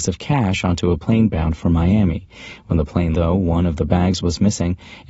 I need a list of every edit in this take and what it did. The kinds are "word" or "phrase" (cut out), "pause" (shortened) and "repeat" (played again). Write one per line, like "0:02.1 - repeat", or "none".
0:03.1 - word